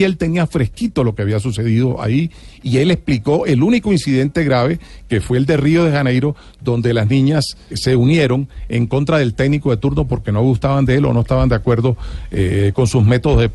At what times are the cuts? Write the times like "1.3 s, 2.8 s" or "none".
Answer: 7.7 s